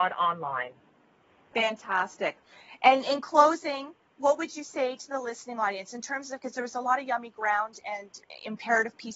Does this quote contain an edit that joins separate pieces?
no; 0 cuts

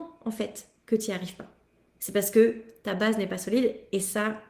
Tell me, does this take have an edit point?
no; 0 cuts

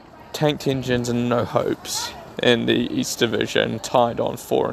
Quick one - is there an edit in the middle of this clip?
no; 0 cuts

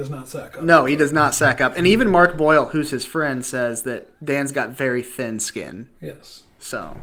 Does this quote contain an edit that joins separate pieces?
yes; 2 cuts; at 4.1 s, 6.0 s

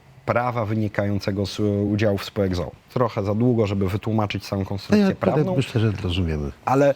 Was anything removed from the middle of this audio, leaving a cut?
no; 0 cuts

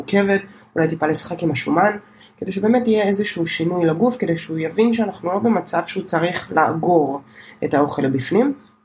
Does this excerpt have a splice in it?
no; 0 cuts

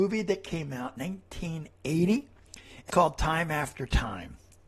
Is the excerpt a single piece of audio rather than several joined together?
no; 2 cuts; at 1.0 s, 2.9 s

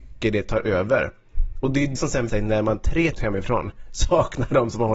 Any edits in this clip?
yes; 3 cuts; at 1.9 s, 2.3 s, 3.1 s

